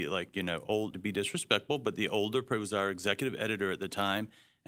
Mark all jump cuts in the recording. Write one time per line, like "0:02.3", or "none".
0:00.9